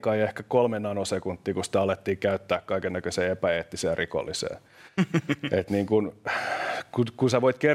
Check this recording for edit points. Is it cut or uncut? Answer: uncut